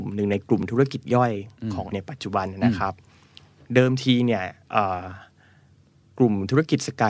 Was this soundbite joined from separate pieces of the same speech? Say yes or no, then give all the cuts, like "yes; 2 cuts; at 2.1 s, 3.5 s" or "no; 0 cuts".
yes; 1 cut; at 1.9 s